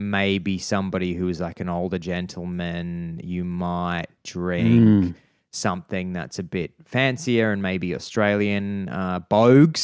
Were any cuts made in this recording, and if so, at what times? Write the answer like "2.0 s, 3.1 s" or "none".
none